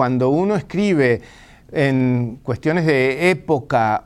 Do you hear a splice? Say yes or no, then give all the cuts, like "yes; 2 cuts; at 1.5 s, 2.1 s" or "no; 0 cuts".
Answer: no; 0 cuts